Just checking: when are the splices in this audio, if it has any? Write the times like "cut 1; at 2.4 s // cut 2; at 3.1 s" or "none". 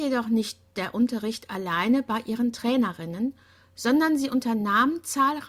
none